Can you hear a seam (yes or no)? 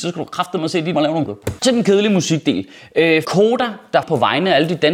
yes